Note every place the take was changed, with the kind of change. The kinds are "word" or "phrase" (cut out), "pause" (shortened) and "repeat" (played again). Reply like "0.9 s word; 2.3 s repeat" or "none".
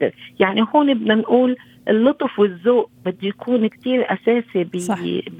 3.7 s word